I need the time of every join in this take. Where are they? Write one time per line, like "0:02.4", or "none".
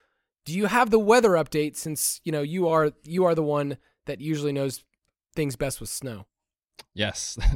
none